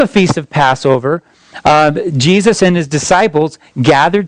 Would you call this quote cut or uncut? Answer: uncut